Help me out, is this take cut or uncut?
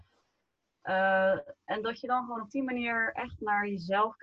uncut